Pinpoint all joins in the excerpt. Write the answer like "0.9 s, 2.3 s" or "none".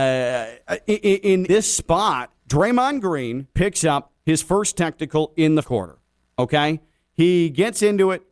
1.5 s, 2.4 s, 3.5 s, 4.2 s, 5.6 s